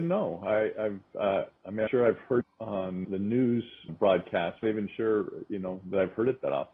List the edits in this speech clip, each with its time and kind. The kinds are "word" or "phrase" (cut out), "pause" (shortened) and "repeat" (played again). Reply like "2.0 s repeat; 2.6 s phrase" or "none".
1.6 s pause; 1.9 s word; 2.4 s word; 3.0 s word; 3.9 s word; 4.6 s phrase